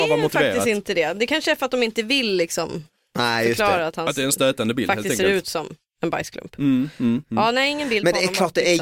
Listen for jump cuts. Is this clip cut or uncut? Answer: uncut